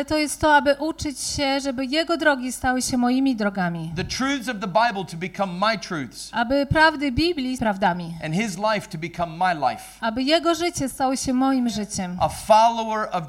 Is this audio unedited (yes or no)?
no